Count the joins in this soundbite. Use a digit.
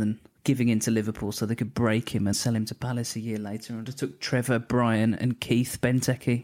2